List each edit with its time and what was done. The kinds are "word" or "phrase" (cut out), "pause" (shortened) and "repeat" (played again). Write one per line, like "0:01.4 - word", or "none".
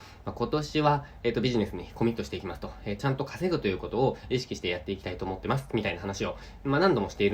0:03.0 - word